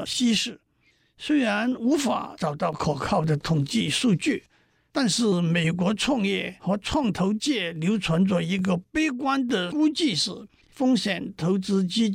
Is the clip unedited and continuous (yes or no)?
yes